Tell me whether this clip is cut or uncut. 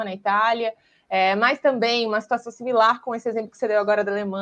uncut